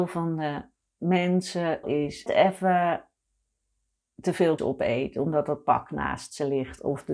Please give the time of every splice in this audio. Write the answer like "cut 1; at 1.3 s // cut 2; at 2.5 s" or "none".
cut 1; at 1.8 s // cut 2; at 2.3 s // cut 3; at 4.6 s

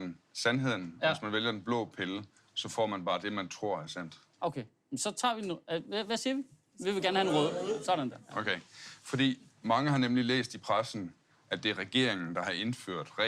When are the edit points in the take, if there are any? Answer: none

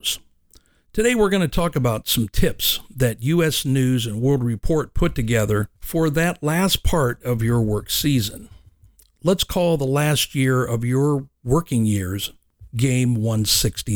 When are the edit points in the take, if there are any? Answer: cut 1; at 5.8 s

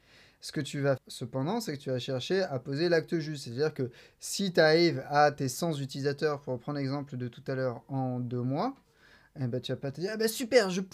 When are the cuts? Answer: cut 1; at 1.0 s

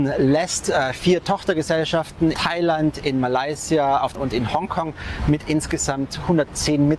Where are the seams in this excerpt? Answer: cut 1; at 2.3 s // cut 2; at 4.1 s

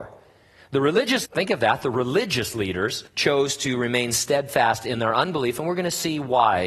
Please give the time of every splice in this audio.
cut 1; at 1.3 s // cut 2; at 3.1 s

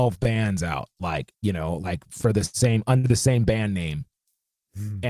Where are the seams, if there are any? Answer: cut 1; at 1.3 s

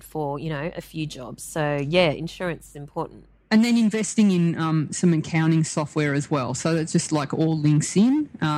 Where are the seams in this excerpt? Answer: none

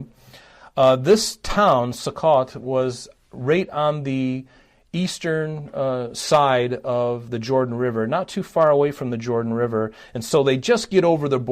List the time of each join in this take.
none

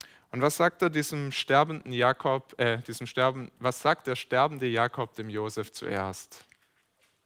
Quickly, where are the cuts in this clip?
none

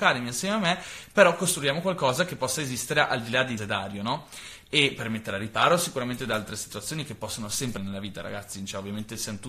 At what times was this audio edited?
cut 1; at 3.6 s // cut 2; at 7.8 s

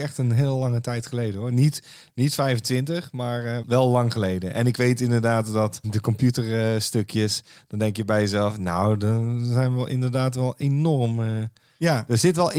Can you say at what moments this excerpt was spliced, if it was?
cut 1; at 3.6 s

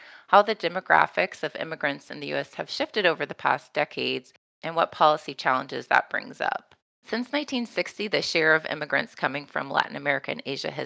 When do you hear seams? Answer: none

